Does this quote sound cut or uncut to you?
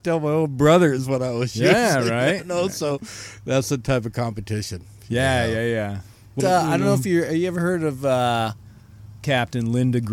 cut